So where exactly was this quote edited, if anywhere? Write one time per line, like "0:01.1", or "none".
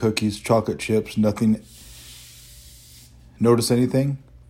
none